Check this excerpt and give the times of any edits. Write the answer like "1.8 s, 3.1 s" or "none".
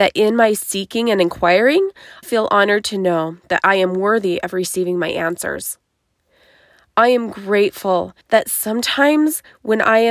2.2 s, 8.2 s